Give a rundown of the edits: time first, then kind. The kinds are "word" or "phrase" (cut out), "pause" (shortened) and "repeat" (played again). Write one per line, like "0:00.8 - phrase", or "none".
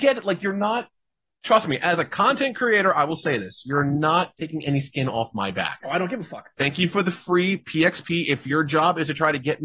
none